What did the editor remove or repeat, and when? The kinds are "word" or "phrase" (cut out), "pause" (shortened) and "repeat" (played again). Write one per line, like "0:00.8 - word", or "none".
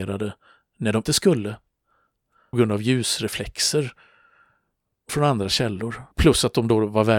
0:01.0 - word
0:02.5 - word
0:05.1 - word
0:06.1 - pause